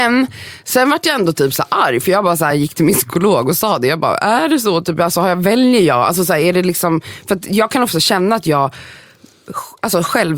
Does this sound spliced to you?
no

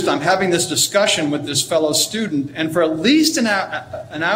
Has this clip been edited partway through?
no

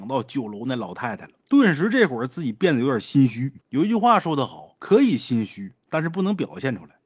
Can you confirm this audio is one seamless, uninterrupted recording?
no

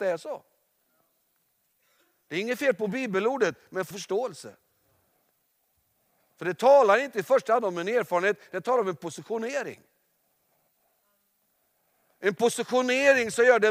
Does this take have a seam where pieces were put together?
yes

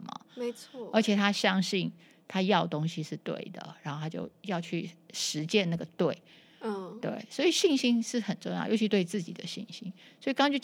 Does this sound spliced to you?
no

